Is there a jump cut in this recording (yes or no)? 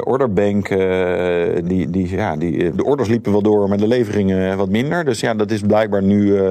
yes